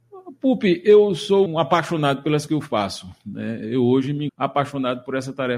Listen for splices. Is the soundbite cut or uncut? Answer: cut